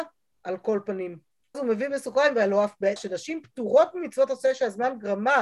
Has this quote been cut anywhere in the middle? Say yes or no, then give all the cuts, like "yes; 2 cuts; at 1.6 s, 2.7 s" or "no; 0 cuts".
yes; 2 cuts; at 1.5 s, 3.0 s